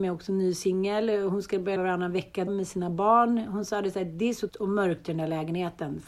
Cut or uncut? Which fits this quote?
cut